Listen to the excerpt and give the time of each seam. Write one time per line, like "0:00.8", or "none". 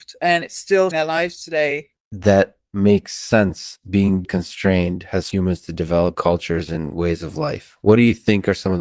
0:00.9
0:02.0
0:04.2
0:05.3
0:06.1